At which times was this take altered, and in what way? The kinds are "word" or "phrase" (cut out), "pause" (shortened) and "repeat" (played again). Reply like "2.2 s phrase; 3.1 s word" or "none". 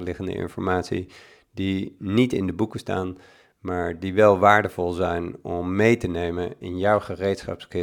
none